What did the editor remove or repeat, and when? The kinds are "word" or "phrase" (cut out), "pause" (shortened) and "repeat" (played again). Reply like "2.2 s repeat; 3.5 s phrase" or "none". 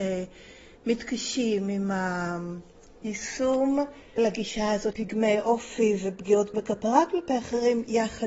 4.2 s word; 4.9 s word; 6.5 s word